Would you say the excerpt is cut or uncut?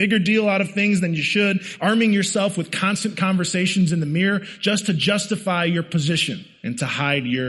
uncut